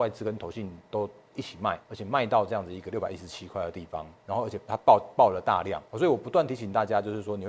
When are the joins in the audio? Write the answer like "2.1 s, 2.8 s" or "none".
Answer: 1.8 s, 4.2 s, 5.9 s